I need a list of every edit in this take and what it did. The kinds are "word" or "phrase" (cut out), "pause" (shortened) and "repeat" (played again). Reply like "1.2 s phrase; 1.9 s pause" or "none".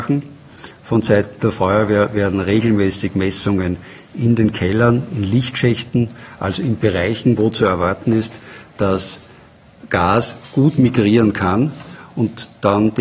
none